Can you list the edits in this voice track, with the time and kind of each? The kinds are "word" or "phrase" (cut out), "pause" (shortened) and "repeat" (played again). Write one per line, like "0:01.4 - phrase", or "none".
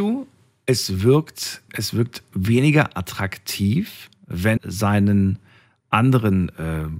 0:01.7 - word
0:04.6 - word